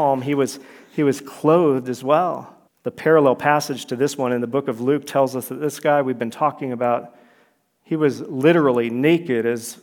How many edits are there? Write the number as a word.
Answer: one